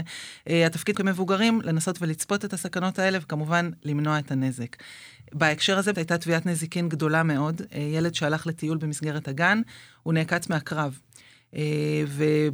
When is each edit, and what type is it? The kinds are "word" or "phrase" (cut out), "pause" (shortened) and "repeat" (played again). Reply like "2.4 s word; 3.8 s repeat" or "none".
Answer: 0.9 s word; 5.9 s word